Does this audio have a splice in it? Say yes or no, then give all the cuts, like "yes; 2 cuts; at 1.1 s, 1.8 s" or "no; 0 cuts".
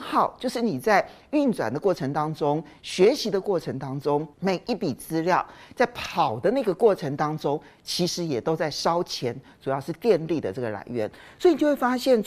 yes; 1 cut; at 4.3 s